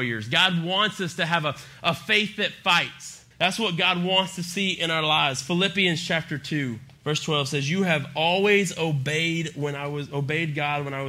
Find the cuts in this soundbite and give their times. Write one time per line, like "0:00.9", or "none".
0:03.3
0:07.0